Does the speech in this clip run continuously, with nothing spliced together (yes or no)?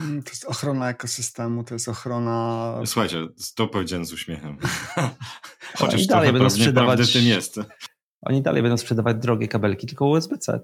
yes